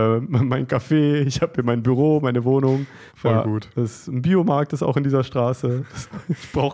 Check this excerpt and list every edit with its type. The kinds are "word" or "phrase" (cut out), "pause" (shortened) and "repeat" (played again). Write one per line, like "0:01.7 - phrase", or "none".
0:03.1 - pause